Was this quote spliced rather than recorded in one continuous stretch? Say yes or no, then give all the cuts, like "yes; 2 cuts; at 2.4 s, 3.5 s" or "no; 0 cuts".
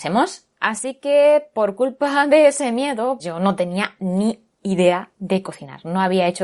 yes; 1 cut; at 3.2 s